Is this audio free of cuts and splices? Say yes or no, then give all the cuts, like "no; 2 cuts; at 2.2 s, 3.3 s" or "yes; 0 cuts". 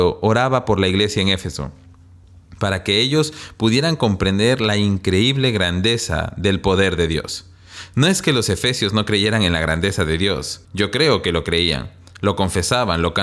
no; 1 cut; at 10.6 s